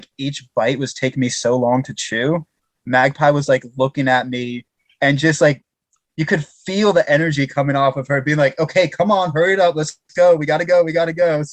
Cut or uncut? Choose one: uncut